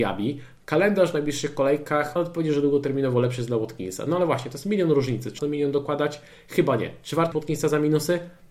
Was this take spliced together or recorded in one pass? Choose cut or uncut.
cut